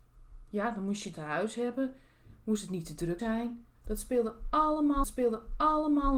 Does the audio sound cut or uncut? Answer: cut